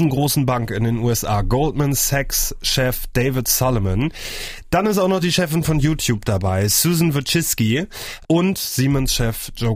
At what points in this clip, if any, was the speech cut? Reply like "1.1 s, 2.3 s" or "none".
none